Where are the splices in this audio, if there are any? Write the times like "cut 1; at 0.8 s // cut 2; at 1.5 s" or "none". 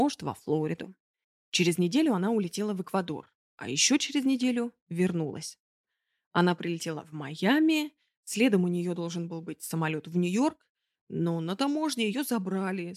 none